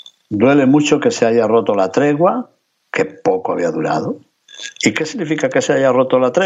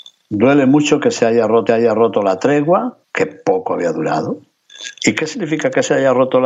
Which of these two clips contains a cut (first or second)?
second